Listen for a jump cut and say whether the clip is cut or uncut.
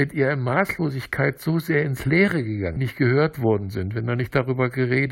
cut